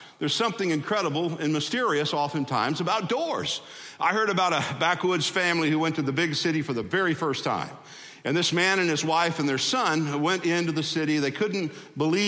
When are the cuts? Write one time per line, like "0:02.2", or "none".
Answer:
none